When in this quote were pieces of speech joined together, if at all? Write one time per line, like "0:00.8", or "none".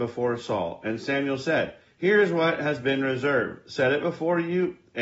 0:01.9

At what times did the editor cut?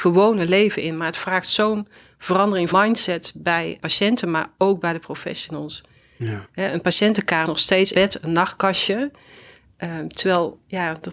0:02.7
0:03.8
0:07.5
0:07.9

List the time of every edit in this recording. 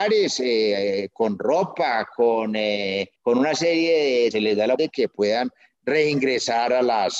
0:03.2
0:04.3
0:04.8

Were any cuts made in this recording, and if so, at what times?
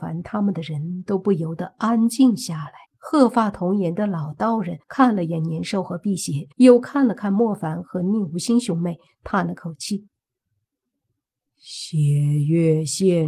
0:02.9
0:04.8
0:06.5
0:10.2

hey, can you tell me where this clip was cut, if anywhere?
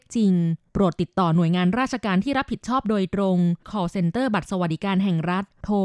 0:03.6

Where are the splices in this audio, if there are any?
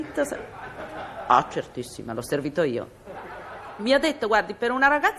none

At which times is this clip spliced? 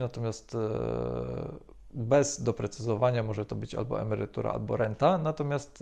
none

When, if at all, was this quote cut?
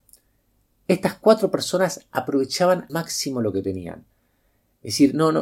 0:02.9

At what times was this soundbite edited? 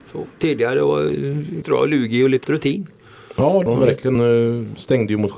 0:01.6
0:02.4
0:03.7
0:04.1

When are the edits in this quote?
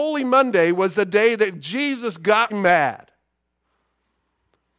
0:02.5

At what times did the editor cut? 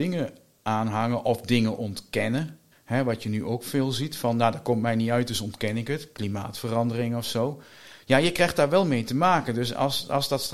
0:02.7

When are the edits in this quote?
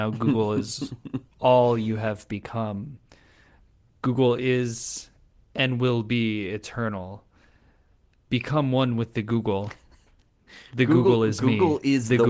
none

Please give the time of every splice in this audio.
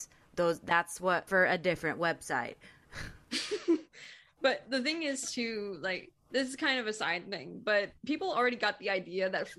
0:01.3
0:06.2
0:08.0

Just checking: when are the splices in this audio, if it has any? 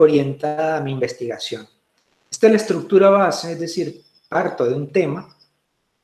none

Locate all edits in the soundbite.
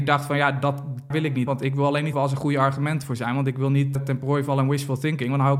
0:01.1
0:01.5
0:02.1
0:04.0

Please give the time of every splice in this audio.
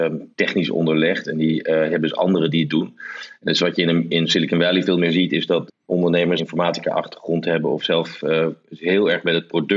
0:02.7
0:05.7
0:06.4

